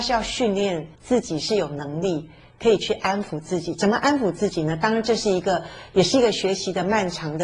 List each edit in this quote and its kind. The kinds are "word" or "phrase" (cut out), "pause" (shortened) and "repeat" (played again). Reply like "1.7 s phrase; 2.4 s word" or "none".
0.9 s pause

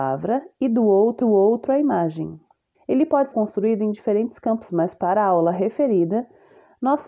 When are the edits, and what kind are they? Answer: 1.2 s repeat; 2.7 s pause; 3.3 s word; 4.7 s word

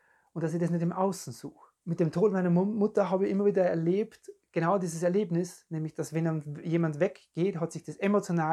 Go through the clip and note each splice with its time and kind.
1.8 s pause

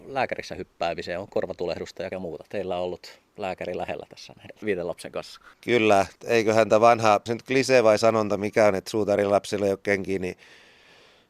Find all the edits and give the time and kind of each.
2.1 s word; 3.3 s pause; 6.2 s pause; 7.3 s phrase

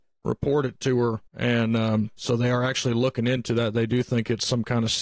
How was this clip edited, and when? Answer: 1.3 s pause

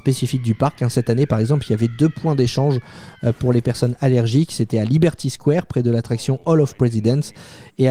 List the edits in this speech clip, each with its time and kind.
none

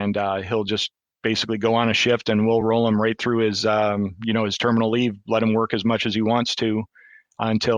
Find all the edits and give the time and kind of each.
none

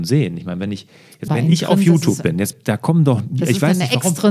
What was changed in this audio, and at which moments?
1.3 s word; 2.5 s phrase

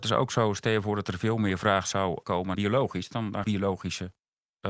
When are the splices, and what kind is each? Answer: 2.2 s word; 2.5 s word; 3.4 s phrase

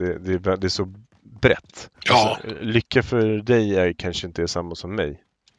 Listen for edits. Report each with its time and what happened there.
1.9 s pause

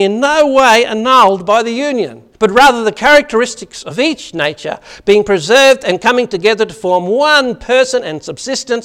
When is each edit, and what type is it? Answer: 2.3 s pause

